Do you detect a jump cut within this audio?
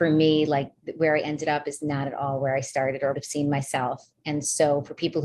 yes; 1 cut; at 3.1 s

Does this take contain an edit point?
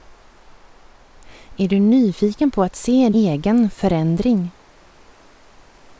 yes; 1 cut; at 3.1 s

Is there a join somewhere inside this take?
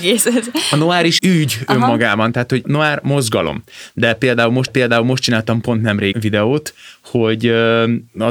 yes; 4 cuts; at 1.2 s, 2.6 s, 4.7 s, 6.1 s

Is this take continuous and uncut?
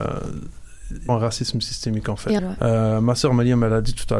no; 2 cuts; at 1.1 s, 2.4 s

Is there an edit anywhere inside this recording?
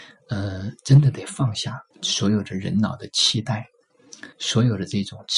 yes; 2 cuts; at 1.9 s, 4.3 s

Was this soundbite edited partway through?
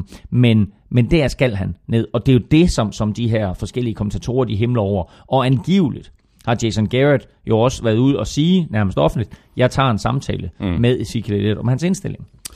no; 0 cuts

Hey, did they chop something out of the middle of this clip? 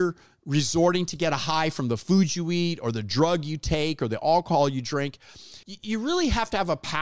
yes; 1 cut; at 5.6 s

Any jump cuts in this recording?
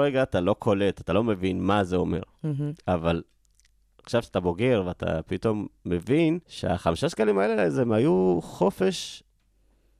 yes; 1 cut; at 6.4 s

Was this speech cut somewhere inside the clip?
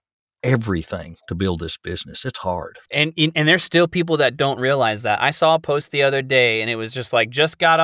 yes; 2 cuts; at 1.2 s, 2.8 s

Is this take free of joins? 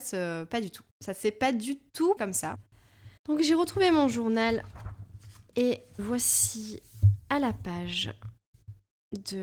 no; 4 cuts; at 0.9 s, 2.2 s, 3.2 s, 6.0 s

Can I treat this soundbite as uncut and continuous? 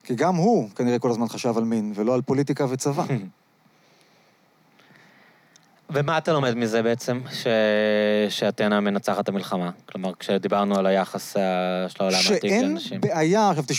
yes; 0 cuts

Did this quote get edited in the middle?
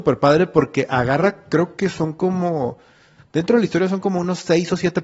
no; 0 cuts

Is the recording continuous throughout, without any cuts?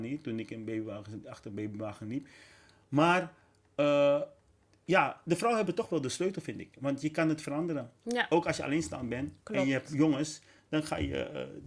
yes; 0 cuts

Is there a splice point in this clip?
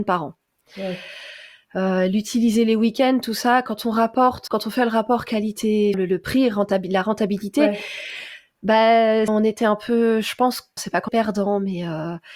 yes; 5 cuts; at 4.5 s, 5.9 s, 9.3 s, 10.8 s, 11.1 s

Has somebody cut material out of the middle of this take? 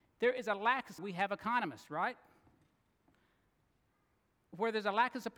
yes; 1 cut; at 1.0 s

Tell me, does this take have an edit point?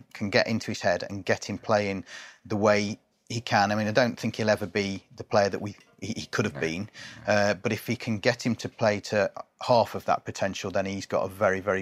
no; 0 cuts

